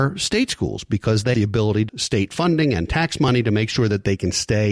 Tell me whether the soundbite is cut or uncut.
cut